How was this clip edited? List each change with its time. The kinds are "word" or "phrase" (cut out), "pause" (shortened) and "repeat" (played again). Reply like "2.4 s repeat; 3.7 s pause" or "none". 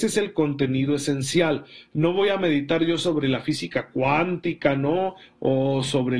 none